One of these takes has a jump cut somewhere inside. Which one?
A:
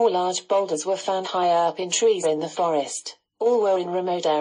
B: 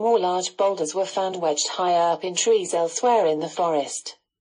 A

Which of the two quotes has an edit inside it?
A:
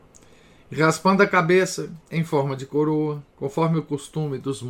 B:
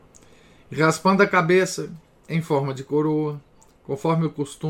A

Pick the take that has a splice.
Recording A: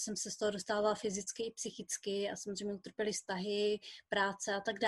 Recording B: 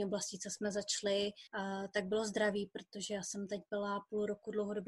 B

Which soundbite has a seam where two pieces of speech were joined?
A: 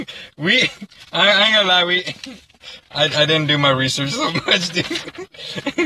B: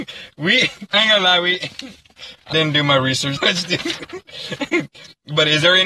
B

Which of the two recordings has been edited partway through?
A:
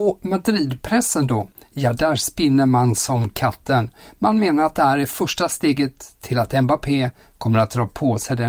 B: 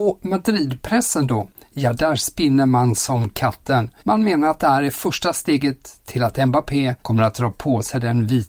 B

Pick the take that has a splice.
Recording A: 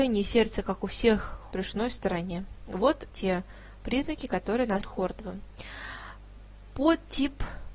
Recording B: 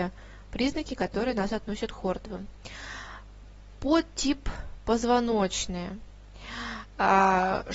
A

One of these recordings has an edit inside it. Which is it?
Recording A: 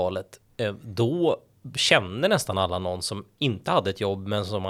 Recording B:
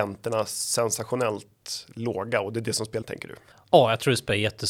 B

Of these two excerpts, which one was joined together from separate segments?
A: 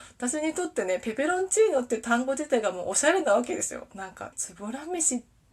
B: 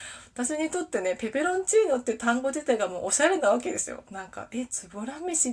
A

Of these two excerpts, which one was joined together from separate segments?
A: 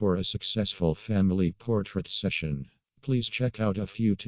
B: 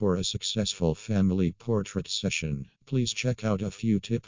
B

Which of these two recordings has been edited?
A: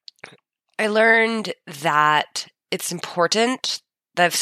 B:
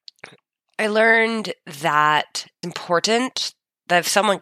B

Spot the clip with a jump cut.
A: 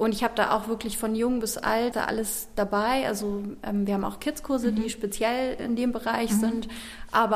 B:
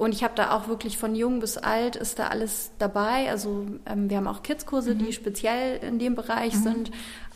A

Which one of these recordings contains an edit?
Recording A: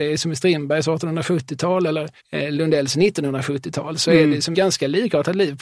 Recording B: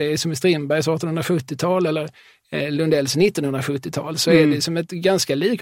A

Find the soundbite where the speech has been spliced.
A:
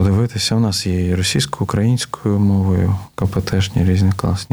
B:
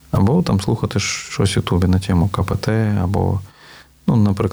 A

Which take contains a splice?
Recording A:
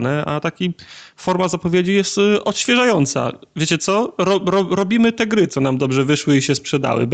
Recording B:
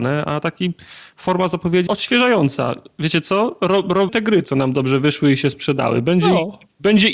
B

